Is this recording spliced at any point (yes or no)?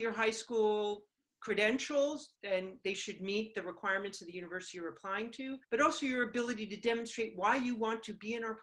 yes